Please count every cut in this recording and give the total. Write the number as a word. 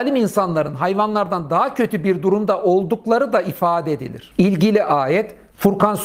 zero